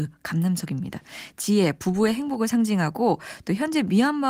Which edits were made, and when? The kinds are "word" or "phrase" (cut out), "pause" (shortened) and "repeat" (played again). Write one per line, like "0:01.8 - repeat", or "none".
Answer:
none